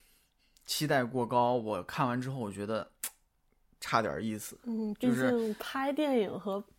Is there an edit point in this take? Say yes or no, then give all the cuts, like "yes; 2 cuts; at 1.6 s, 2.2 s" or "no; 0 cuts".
no; 0 cuts